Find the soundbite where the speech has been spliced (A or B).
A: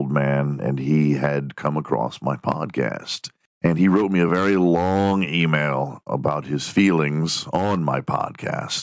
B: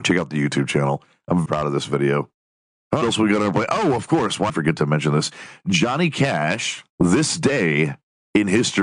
B